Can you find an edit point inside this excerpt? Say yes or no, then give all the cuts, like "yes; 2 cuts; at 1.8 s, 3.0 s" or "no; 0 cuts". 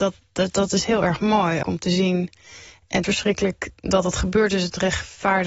yes; 2 cuts; at 1.6 s, 3.0 s